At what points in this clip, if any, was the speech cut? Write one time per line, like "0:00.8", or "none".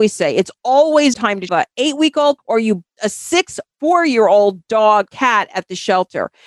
0:01.1
0:01.5
0:02.4
0:03.0
0:03.7
0:05.1